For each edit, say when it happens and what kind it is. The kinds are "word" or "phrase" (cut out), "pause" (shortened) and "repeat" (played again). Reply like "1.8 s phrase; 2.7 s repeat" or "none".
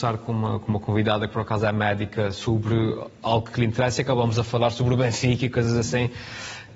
none